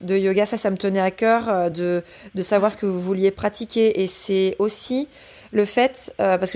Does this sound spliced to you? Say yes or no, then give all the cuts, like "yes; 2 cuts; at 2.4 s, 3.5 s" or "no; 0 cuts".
no; 0 cuts